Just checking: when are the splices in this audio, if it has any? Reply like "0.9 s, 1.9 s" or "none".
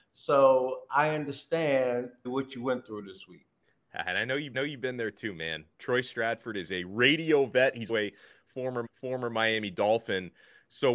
2.2 s, 4.5 s, 7.9 s, 8.8 s